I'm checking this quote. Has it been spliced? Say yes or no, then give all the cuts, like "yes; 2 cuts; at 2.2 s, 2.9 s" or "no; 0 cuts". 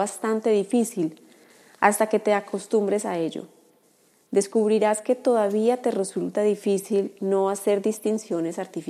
no; 0 cuts